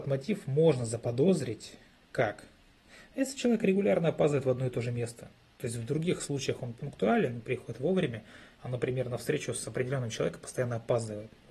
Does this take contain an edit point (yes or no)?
no